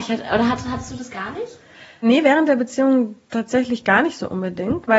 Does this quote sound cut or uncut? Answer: uncut